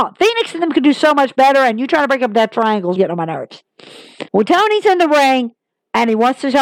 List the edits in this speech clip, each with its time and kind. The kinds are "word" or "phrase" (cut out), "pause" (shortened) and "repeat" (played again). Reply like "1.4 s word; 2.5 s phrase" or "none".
3.0 s word; 4.3 s pause